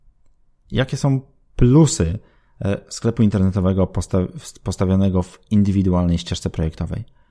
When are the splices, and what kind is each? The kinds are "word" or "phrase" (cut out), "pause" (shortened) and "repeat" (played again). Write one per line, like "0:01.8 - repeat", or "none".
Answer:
none